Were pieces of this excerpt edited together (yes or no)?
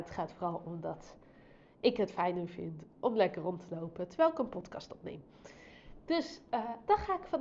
no